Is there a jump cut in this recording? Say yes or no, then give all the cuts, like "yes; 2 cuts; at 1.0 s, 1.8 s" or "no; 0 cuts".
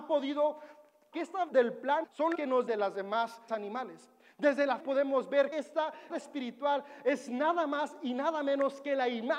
yes; 9 cuts; at 1.1 s, 1.5 s, 2.0 s, 2.3 s, 2.7 s, 3.5 s, 4.8 s, 5.5 s, 6.1 s